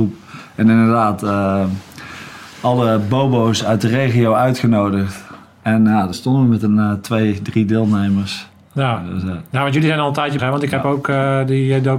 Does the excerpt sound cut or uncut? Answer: cut